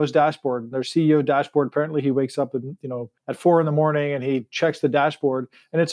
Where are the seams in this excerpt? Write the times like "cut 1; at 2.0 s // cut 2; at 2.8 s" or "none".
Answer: cut 1; at 3.2 s